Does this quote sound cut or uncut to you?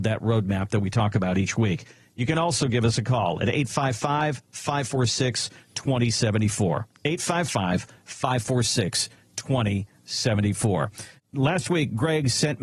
uncut